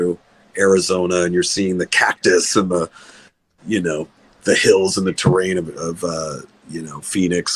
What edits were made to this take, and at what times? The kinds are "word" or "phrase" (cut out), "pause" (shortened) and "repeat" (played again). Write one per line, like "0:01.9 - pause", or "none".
none

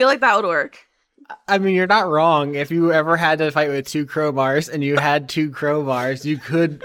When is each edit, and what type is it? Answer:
none

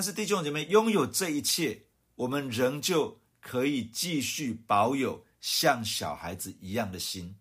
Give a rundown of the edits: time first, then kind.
0:01.9 - pause

